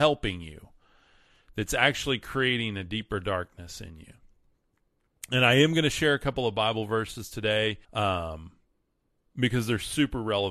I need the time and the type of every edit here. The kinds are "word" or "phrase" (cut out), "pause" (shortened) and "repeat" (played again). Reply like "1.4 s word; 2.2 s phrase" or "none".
7.8 s pause